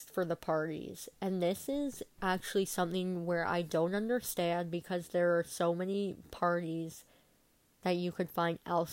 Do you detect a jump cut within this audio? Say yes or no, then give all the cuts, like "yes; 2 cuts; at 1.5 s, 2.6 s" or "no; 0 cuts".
no; 0 cuts